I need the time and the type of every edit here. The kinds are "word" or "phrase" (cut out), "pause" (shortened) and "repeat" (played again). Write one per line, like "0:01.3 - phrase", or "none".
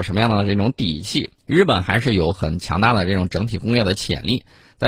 0:01.4 - pause